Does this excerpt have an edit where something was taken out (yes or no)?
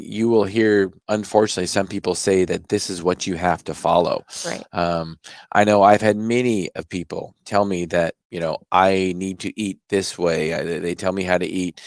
yes